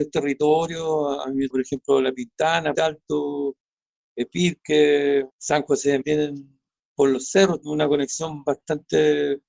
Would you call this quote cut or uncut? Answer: cut